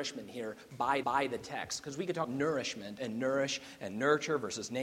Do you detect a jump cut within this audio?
yes; 3 cuts; at 1.0 s, 2.2 s, 3.0 s

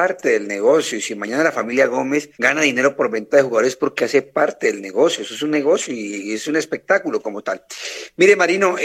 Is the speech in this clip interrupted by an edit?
yes; 1 cut; at 2.3 s

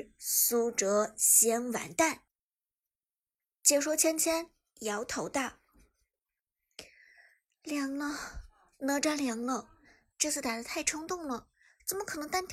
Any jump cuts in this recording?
no; 0 cuts

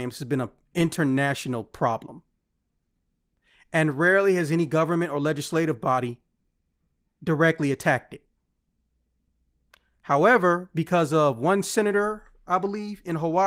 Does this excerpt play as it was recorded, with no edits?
yes; 0 cuts

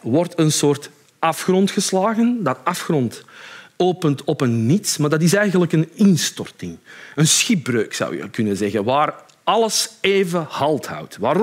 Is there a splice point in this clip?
no; 0 cuts

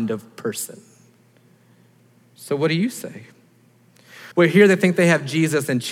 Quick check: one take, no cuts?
no; 1 cut; at 4.3 s

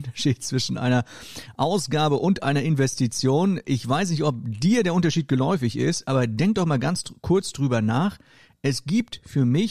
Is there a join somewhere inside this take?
no; 0 cuts

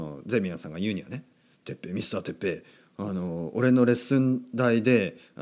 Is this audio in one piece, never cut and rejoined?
yes; 0 cuts

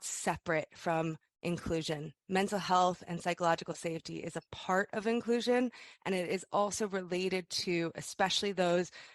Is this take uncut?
yes; 0 cuts

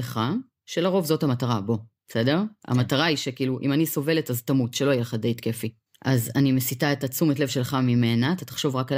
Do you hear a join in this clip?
no; 0 cuts

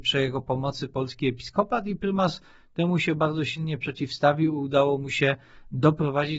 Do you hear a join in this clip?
no; 0 cuts

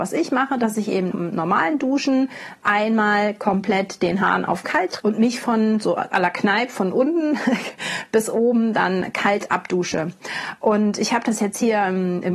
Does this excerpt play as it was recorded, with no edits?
no; 2 cuts; at 1.1 s, 5.0 s

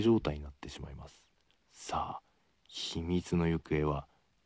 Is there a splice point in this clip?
yes; 1 cut; at 1.6 s

